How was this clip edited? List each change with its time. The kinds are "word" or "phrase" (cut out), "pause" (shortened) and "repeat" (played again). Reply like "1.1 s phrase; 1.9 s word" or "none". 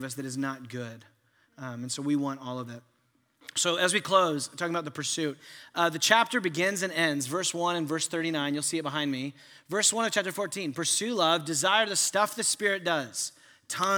none